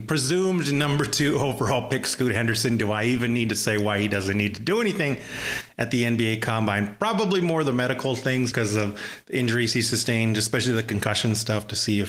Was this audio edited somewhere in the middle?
yes; 1 cut; at 8.5 s

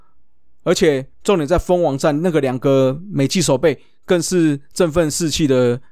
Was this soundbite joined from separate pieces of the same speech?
yes; 1 cut; at 1.1 s

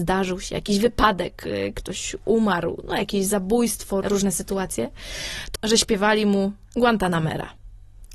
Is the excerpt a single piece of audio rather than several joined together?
no; 2 cuts; at 4.0 s, 5.6 s

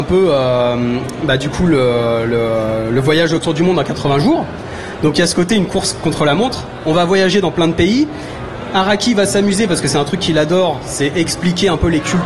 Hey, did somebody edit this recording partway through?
no; 0 cuts

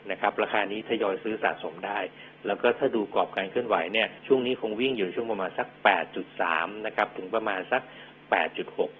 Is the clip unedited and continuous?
no; 1 cut; at 4.2 s

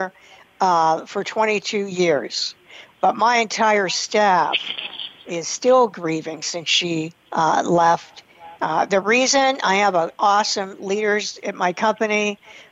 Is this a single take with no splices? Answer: no; 1 cut; at 7.2 s

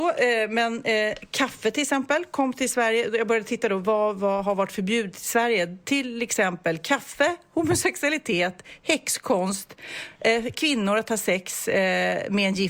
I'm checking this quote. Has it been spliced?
no; 0 cuts

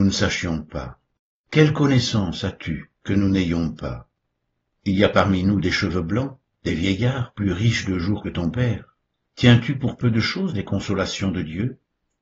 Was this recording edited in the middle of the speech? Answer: yes; 2 cuts; at 3.0 s, 9.1 s

